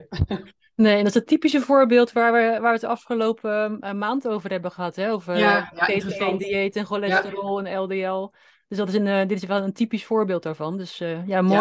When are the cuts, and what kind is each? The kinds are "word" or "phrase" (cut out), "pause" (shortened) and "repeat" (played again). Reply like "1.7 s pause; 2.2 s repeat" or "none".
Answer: none